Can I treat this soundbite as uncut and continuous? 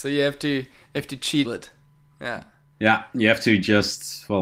no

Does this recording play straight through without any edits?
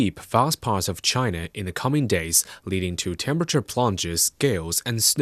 yes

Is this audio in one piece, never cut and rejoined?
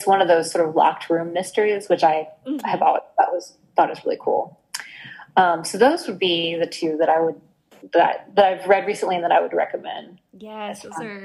yes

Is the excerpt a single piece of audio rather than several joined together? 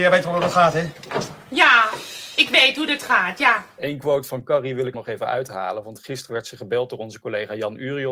no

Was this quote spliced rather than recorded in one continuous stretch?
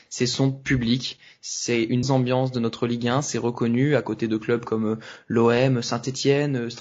yes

